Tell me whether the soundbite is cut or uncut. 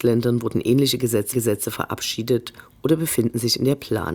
cut